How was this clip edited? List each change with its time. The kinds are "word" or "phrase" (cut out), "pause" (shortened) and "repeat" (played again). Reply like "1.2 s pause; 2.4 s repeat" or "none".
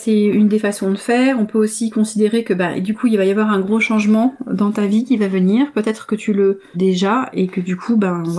6.7 s word